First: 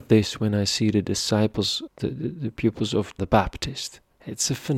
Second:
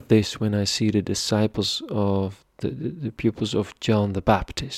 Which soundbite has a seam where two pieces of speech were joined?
first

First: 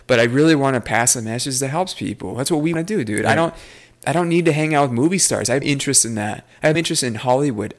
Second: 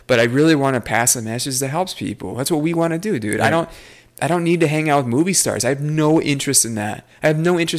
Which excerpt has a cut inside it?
first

